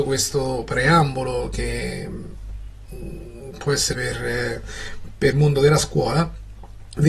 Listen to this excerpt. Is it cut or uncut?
cut